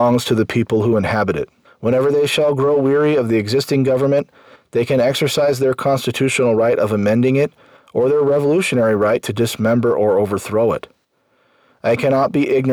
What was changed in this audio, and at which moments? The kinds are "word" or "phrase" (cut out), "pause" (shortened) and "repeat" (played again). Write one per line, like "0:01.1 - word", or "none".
0:01.6 - pause